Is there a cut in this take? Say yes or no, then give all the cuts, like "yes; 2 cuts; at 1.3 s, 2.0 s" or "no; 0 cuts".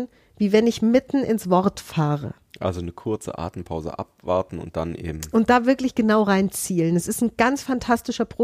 no; 0 cuts